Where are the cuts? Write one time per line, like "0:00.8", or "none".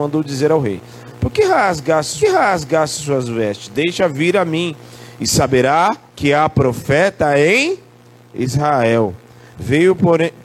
0:02.2
0:06.1